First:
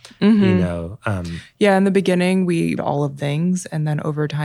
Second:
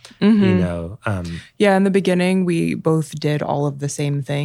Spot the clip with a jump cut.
first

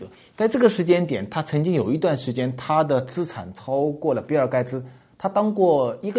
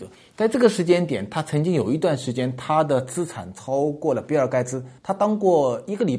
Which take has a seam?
second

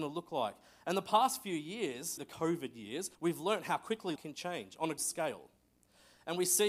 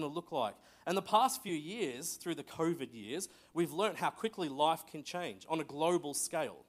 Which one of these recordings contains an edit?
first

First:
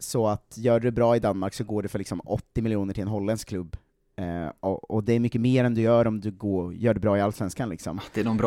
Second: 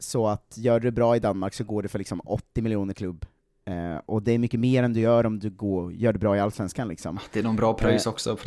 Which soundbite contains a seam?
second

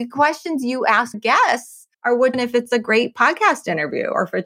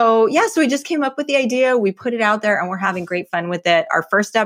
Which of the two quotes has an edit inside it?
first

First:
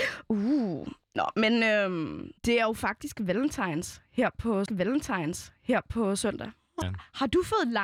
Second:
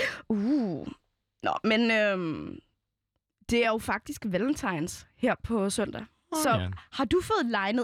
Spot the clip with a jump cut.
first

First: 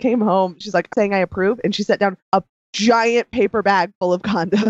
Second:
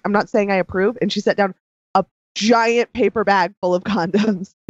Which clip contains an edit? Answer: first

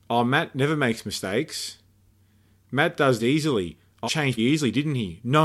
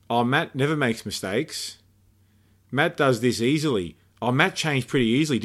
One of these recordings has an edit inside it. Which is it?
first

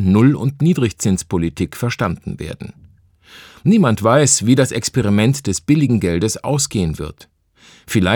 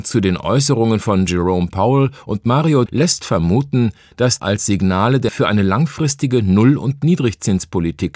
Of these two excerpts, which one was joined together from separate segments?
second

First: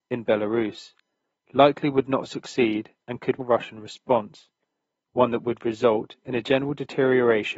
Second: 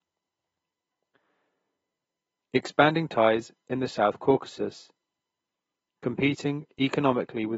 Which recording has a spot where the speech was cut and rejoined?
first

